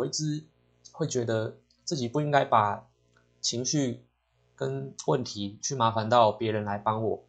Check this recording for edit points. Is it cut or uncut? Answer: uncut